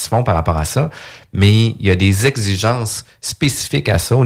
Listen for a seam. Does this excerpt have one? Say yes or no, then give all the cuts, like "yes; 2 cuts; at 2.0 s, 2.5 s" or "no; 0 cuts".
no; 0 cuts